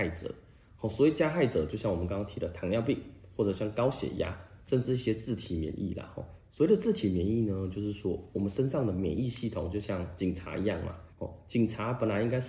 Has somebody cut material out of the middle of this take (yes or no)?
yes